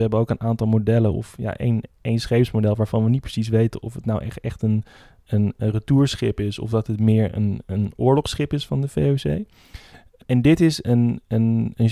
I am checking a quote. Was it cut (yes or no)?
no